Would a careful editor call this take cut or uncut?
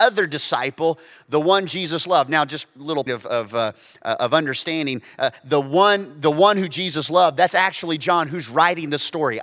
cut